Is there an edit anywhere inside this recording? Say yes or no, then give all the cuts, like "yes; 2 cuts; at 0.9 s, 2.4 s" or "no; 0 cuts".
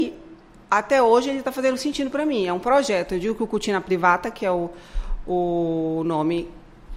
no; 0 cuts